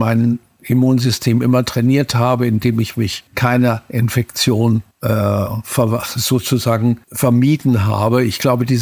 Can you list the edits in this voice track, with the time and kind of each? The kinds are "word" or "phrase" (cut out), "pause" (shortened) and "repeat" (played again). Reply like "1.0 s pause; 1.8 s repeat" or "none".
3.3 s pause; 4.9 s pause; 7.0 s pause